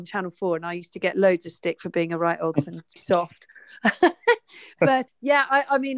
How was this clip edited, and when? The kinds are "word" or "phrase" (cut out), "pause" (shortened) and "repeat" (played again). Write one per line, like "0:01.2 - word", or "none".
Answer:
0:02.5 - word
0:03.0 - word
0:05.1 - word